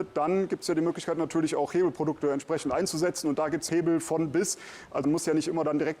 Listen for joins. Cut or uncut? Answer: cut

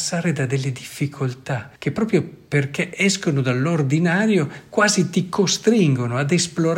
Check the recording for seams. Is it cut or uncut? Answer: cut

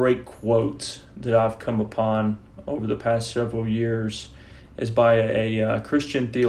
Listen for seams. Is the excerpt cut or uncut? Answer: uncut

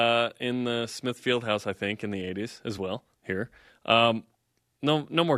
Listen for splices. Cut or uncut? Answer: uncut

